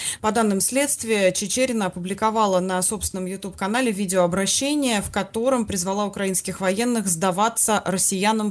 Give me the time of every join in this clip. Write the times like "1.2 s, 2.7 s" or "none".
none